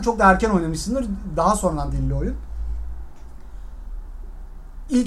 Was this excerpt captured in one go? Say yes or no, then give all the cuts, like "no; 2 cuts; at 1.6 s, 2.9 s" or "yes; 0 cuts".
no; 1 cut; at 1.9 s